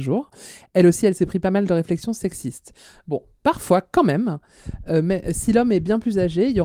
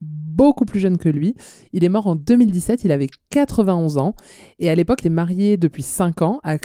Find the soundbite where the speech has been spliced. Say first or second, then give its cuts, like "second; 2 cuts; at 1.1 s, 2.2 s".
second; 1 cut; at 5.0 s